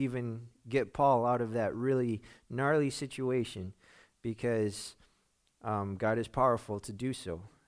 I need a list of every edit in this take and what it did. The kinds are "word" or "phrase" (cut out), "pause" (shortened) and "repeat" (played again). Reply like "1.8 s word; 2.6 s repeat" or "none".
none